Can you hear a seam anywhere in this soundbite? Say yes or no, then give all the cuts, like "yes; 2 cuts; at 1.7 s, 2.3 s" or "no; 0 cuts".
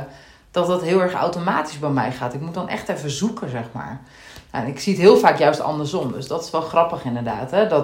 no; 0 cuts